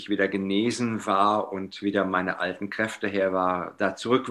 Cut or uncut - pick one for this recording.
uncut